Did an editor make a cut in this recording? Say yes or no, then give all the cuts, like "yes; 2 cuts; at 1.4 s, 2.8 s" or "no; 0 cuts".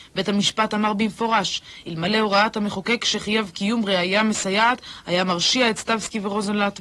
no; 0 cuts